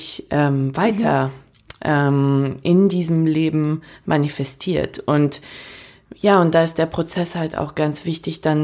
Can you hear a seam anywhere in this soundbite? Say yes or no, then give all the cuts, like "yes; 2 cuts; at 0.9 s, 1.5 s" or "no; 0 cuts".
no; 0 cuts